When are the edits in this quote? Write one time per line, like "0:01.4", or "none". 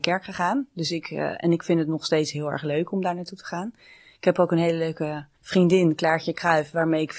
0:05.4